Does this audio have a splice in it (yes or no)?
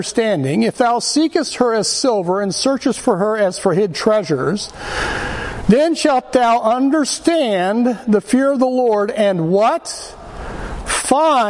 no